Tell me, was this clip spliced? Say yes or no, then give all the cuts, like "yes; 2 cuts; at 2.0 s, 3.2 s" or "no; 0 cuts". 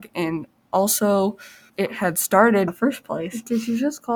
yes; 2 cuts; at 1.7 s, 2.7 s